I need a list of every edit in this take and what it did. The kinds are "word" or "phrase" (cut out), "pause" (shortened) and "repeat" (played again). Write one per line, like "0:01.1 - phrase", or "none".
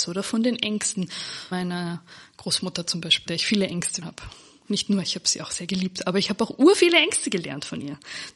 0:01.5 - word
0:03.3 - word
0:04.0 - word